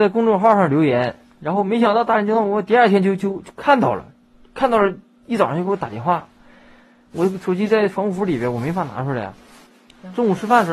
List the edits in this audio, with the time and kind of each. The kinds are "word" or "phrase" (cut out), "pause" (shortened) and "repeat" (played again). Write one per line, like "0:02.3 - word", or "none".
none